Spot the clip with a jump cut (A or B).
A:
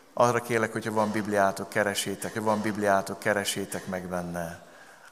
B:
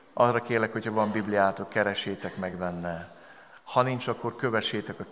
A